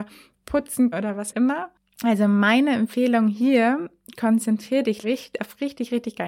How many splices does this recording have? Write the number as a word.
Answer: three